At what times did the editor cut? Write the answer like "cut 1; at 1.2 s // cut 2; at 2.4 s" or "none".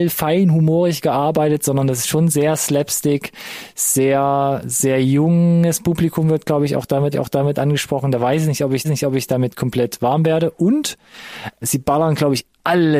cut 1; at 7.1 s // cut 2; at 8.8 s // cut 3; at 11.6 s